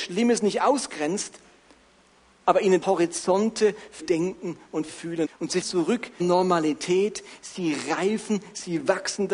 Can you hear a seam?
yes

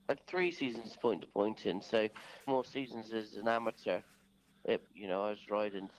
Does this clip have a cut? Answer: yes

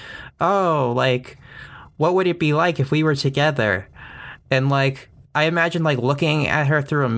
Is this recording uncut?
yes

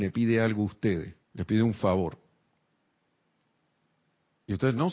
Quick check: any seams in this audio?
yes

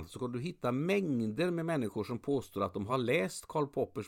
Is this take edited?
no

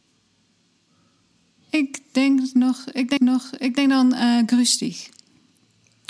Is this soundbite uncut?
no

